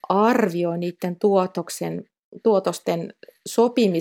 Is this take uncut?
yes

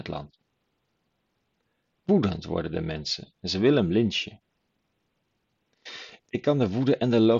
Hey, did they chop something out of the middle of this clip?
yes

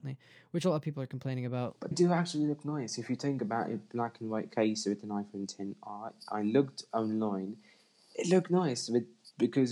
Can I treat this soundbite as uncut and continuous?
no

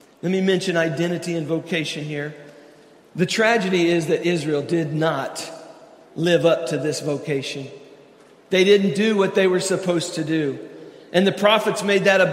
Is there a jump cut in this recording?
no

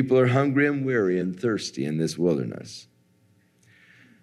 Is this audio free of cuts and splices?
yes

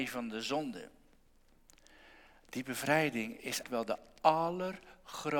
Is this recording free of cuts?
no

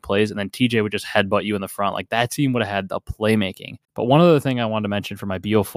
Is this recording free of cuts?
no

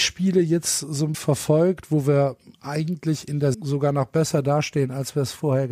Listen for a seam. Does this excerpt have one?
yes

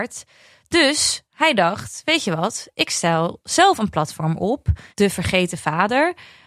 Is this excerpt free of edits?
no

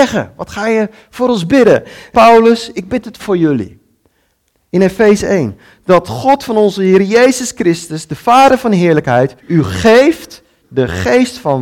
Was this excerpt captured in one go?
no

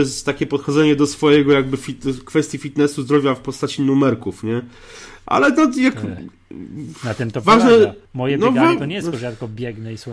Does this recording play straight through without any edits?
no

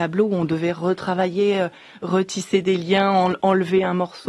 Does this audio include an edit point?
no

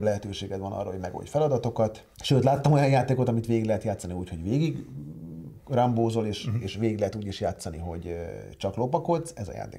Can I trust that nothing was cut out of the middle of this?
no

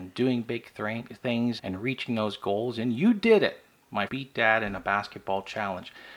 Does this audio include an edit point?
yes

